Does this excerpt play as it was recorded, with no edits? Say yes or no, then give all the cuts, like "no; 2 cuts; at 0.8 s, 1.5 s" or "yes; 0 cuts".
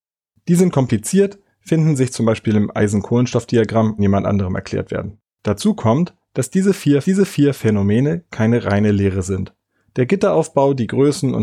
no; 3 cuts; at 4.0 s, 5.3 s, 7.0 s